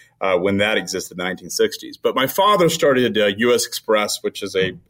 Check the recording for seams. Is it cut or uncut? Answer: uncut